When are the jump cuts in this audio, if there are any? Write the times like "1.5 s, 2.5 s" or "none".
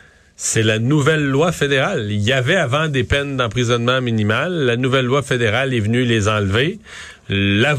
none